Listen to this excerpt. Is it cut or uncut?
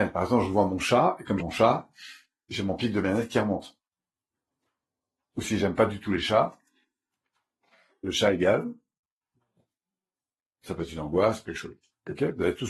cut